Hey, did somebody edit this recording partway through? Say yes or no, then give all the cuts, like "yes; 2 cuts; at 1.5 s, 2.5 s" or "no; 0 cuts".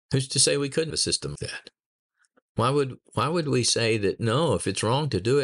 yes; 2 cuts; at 0.9 s, 1.4 s